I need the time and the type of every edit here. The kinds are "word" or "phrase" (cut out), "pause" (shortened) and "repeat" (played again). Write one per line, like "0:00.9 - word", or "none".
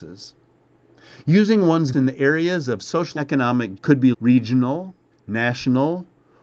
0:01.9 - word
0:03.2 - word
0:03.8 - word
0:04.1 - word
0:05.1 - pause